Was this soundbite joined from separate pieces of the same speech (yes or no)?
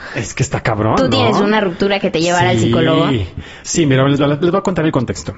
no